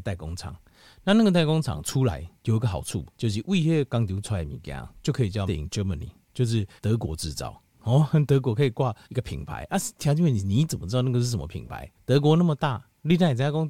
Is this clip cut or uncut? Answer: cut